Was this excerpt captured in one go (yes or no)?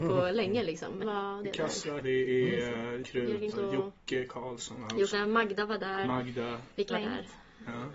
no